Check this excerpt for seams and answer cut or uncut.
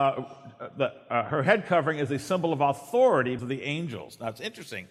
cut